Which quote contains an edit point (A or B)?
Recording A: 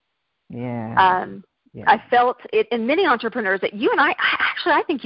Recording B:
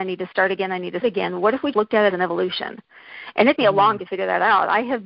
B